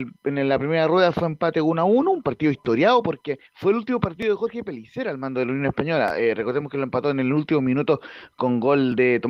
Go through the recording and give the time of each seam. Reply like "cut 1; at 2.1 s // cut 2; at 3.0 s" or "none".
cut 1; at 3.5 s